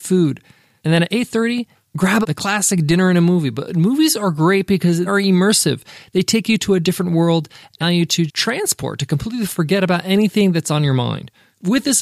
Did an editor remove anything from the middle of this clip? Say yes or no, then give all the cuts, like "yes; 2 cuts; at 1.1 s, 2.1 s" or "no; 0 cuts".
yes; 4 cuts; at 2.2 s, 5.1 s, 7.8 s, 8.3 s